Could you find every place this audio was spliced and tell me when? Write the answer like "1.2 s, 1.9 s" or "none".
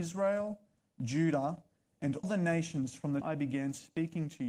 2.2 s, 3.2 s